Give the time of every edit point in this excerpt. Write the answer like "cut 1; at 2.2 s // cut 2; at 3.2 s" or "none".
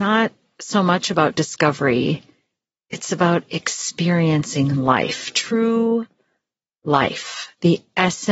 none